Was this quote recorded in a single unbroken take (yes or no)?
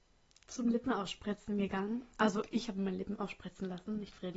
yes